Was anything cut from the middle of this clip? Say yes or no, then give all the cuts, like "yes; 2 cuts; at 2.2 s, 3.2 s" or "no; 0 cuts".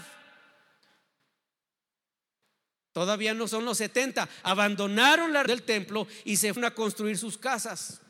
yes; 2 cuts; at 5.5 s, 6.6 s